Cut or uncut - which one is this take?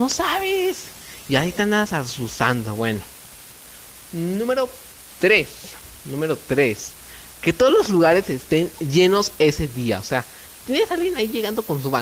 uncut